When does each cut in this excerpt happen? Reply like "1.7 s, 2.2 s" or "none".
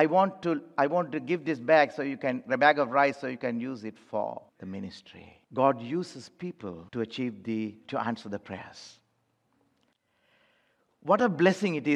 4.5 s, 5.4 s, 6.9 s